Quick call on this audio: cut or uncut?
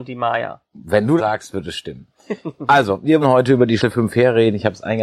cut